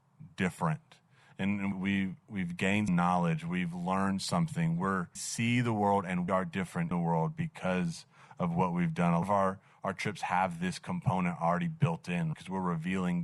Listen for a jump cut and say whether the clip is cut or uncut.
cut